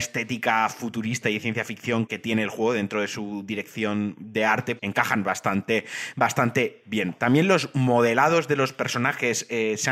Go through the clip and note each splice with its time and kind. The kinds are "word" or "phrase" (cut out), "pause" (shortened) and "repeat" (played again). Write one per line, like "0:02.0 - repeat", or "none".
0:02.1 - word
0:04.8 - word